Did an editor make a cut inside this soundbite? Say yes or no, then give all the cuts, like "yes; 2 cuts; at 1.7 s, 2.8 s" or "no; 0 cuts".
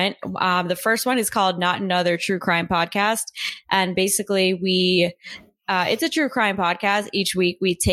no; 0 cuts